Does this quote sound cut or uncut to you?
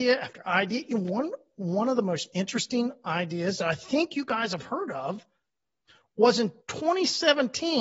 cut